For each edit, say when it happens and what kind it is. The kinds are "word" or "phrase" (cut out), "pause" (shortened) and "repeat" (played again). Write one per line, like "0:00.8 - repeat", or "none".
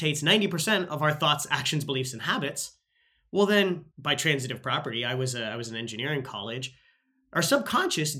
0:03.9 - pause